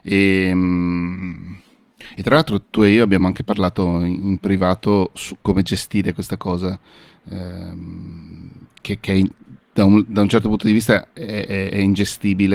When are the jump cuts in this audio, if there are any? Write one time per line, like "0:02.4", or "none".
none